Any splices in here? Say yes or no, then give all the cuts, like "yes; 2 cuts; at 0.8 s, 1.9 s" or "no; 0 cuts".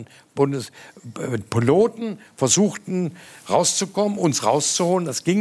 no; 0 cuts